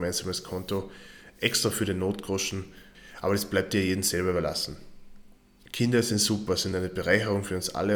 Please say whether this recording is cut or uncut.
uncut